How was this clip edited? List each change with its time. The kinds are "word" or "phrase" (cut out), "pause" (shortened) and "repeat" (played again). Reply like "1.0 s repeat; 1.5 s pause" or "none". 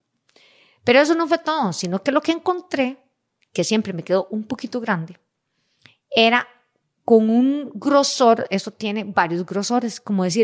none

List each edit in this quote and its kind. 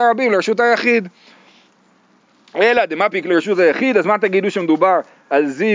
none

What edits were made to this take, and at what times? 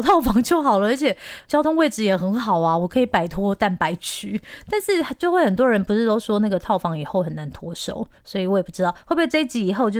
1.4 s pause

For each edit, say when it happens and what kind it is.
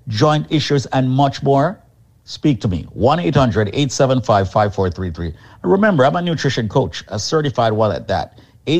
none

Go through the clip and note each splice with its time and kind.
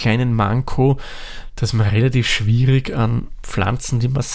none

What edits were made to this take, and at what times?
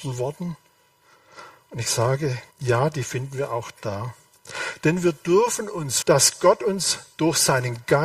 2.5 s pause; 6.0 s word

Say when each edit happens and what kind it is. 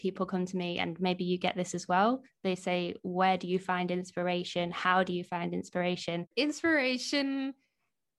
none

